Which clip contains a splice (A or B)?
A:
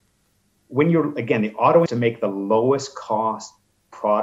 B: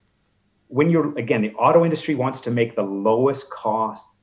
A